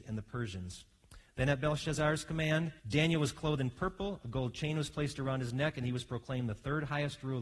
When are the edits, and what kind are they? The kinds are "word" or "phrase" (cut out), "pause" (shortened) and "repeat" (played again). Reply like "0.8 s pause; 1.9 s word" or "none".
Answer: 2.8 s pause